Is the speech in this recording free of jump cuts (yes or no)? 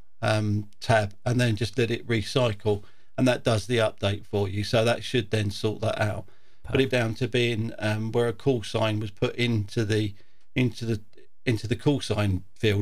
no